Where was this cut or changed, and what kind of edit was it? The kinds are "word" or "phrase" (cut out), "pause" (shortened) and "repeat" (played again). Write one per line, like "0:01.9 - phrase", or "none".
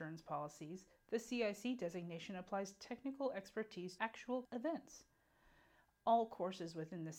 0:04.0 - word
0:04.4 - phrase